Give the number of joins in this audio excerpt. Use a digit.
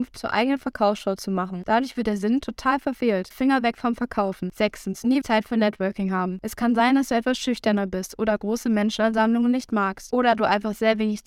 2